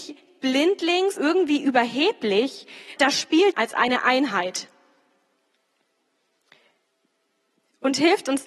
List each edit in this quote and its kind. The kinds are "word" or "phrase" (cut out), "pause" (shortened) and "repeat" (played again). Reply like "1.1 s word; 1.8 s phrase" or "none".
1.2 s word; 3.0 s word; 3.5 s phrase